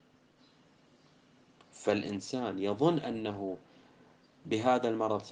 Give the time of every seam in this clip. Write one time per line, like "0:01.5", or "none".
none